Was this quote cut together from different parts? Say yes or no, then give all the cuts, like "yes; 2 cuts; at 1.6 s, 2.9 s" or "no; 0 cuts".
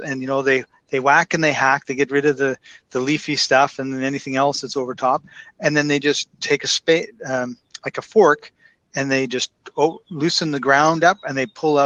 no; 0 cuts